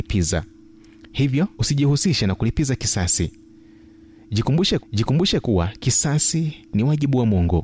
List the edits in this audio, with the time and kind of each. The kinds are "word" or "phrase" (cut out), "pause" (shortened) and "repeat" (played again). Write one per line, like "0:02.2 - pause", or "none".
0:01.5 - pause
0:04.8 - repeat